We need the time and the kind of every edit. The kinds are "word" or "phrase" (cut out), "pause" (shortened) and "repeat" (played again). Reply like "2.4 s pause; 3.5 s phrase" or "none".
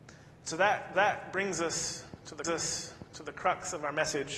0.9 s repeat; 2.4 s repeat